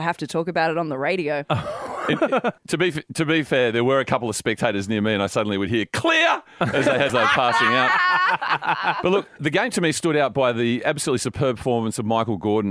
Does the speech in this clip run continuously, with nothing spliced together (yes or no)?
no